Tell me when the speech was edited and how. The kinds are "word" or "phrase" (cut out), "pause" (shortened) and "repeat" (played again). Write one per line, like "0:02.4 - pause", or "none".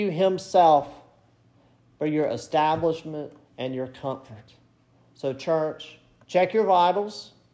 none